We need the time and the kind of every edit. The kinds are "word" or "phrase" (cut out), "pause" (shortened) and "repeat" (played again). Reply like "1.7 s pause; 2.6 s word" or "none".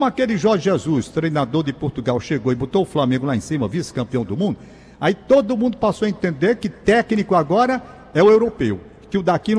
none

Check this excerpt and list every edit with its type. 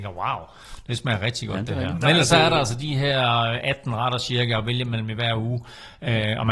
none

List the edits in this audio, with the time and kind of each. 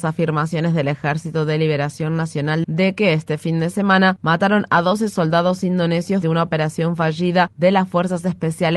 2.6 s phrase; 6.2 s word

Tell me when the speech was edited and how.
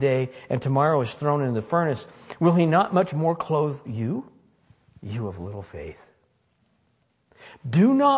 none

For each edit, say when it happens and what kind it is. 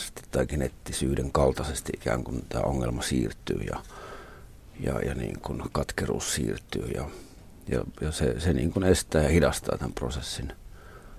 none

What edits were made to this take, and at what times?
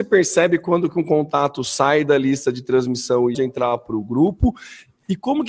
3.3 s phrase

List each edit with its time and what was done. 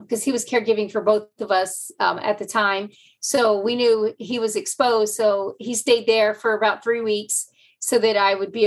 none

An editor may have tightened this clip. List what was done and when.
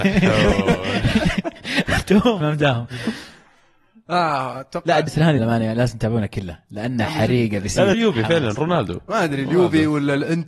2.4 s word; 5.1 s word; 5.4 s word; 7.9 s word

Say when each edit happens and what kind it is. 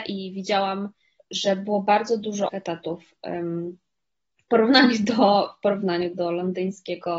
1.2 s word; 2.5 s word

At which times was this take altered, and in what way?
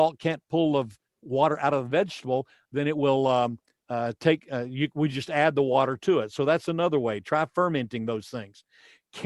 none

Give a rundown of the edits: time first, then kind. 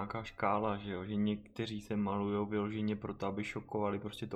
none

